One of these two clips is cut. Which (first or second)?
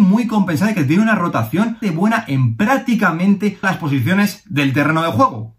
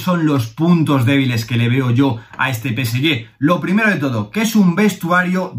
first